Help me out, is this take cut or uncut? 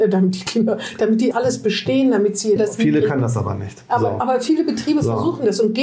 cut